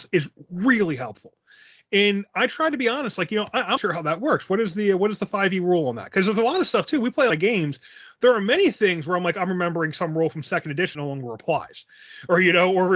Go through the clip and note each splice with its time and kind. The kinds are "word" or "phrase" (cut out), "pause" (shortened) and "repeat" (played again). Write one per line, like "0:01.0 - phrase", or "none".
0:03.8 - word
0:07.3 - word
0:10.9 - word